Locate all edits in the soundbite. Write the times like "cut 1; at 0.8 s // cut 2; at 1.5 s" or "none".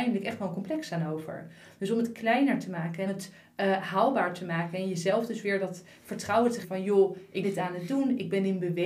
cut 1; at 3.1 s // cut 2; at 6.6 s // cut 3; at 7.4 s

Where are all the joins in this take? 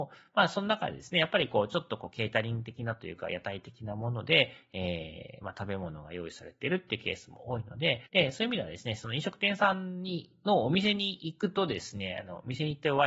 cut 1; at 8.1 s

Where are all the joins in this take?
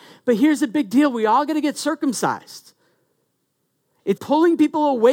cut 1; at 4.2 s

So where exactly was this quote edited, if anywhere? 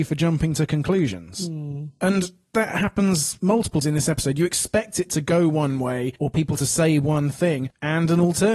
cut 1; at 3.8 s // cut 2; at 6.2 s

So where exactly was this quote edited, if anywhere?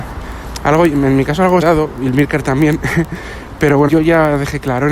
cut 1; at 1.6 s // cut 2; at 3.9 s

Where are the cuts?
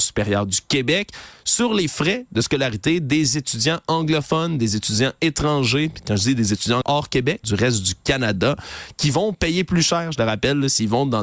cut 1; at 6.8 s // cut 2; at 7.4 s

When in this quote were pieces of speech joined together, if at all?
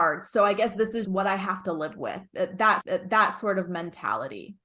cut 1; at 1.0 s // cut 2; at 2.8 s

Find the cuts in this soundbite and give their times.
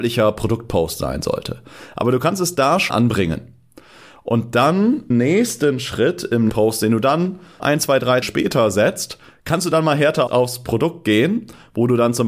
cut 1; at 2.9 s // cut 2; at 5.1 s // cut 3; at 6.5 s // cut 4; at 7.6 s // cut 5; at 8.2 s // cut 6; at 10.3 s

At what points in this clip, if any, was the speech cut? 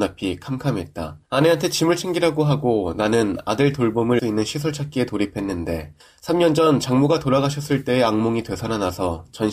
cut 1; at 1.3 s // cut 2; at 4.2 s // cut 3; at 6.0 s

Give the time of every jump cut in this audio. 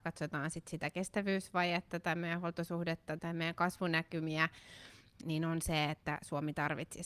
cut 1; at 3.2 s // cut 2; at 5.2 s

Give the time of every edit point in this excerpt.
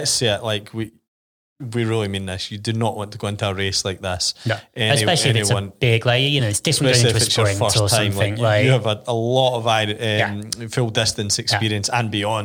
none

